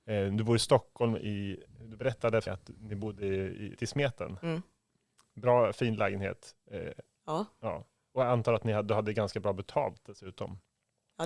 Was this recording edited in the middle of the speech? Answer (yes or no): yes